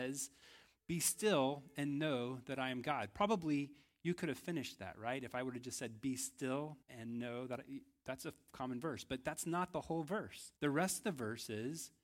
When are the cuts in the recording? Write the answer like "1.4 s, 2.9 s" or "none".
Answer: 6.8 s, 10.6 s